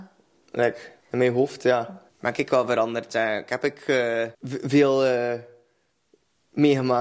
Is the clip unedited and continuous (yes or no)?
no